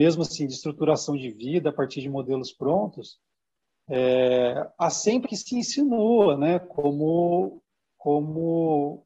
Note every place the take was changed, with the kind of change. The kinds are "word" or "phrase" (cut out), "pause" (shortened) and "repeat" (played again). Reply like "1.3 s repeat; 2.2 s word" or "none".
5.2 s word